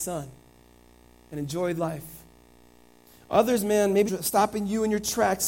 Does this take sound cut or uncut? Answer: cut